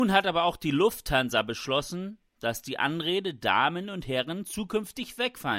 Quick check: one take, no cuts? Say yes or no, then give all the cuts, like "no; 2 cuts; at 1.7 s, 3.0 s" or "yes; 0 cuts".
yes; 0 cuts